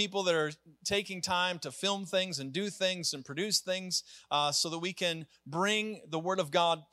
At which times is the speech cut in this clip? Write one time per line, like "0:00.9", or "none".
none